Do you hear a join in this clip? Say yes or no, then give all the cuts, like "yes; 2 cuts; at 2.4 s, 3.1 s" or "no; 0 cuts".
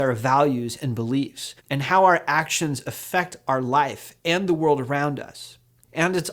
yes; 1 cut; at 1.6 s